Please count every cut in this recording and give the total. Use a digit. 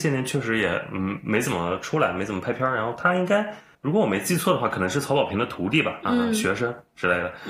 0